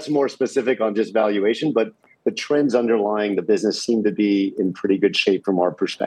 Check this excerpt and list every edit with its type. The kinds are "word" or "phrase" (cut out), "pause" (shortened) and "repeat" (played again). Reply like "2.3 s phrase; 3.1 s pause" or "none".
none